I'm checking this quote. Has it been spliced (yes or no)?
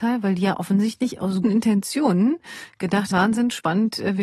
yes